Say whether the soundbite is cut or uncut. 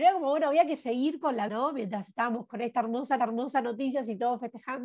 cut